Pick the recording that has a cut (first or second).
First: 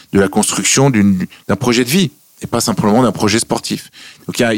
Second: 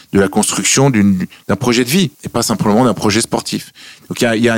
second